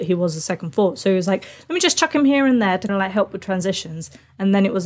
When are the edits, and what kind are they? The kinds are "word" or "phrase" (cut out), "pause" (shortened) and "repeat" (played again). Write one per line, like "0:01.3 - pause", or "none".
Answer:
0:02.9 - word